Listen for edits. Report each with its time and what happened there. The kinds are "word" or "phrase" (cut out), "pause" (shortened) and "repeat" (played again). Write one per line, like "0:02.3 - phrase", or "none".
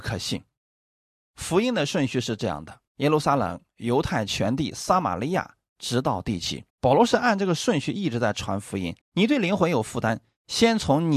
0:02.9 - pause
0:06.7 - pause
0:09.0 - pause